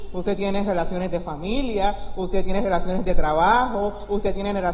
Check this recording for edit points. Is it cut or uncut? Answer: uncut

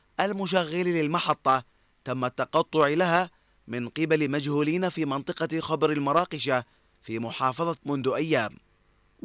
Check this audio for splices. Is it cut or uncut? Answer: cut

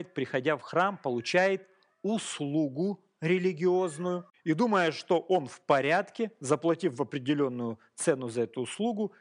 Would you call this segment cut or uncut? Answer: uncut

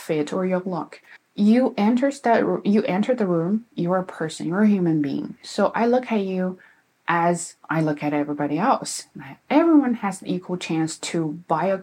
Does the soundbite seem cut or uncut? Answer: cut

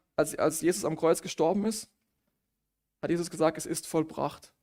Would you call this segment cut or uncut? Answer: uncut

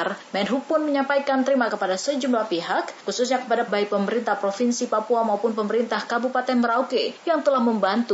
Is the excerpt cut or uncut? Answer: cut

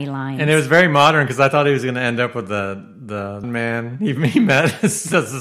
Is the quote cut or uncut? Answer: cut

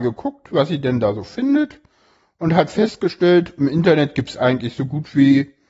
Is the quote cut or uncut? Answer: uncut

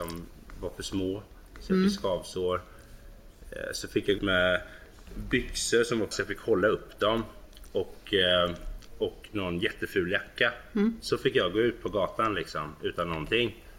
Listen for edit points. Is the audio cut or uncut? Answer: cut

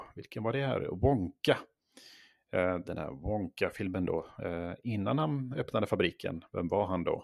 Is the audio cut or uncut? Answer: uncut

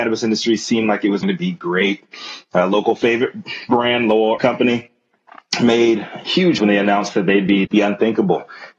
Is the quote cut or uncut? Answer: cut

